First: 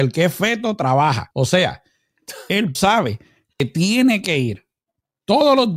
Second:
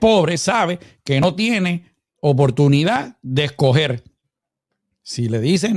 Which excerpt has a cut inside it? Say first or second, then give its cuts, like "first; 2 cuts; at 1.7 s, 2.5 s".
first; 2 cuts; at 1.3 s, 2.7 s